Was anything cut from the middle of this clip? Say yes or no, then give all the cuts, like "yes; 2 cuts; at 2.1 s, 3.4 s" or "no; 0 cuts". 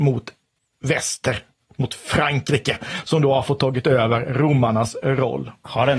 no; 0 cuts